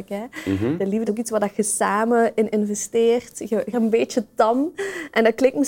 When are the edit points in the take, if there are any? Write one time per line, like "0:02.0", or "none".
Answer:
0:01.1
0:03.7